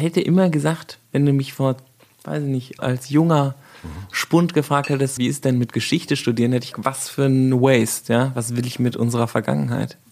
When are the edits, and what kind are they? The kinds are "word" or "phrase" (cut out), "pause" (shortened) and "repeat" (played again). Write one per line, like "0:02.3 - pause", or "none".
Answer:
0:02.8 - word
0:05.2 - word
0:06.7 - word

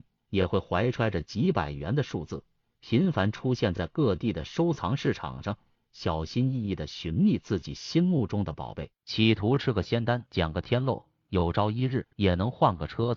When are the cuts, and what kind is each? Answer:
none

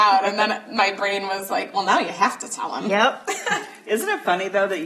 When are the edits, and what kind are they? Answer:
none

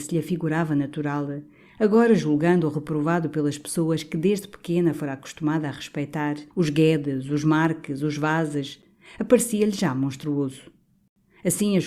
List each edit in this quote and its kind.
0:06.5 - pause

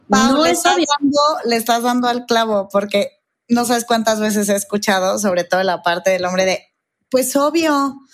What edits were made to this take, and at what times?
none

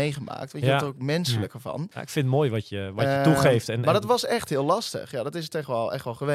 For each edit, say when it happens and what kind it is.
0:01.9 - pause

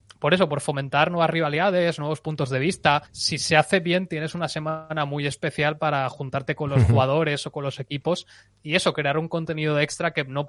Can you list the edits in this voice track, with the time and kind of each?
0:03.1 - pause

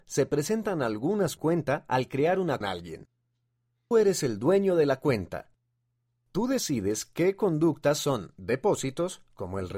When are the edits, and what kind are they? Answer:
0:01.4 - phrase
0:02.6 - phrase
0:03.9 - word

